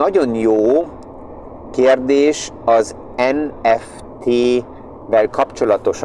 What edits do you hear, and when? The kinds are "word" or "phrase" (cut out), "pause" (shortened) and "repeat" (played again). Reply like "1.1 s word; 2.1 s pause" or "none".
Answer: none